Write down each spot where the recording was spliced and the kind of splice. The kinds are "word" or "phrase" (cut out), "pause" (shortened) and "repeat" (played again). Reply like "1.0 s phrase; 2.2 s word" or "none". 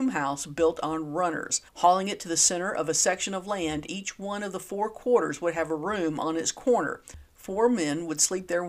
1.7 s pause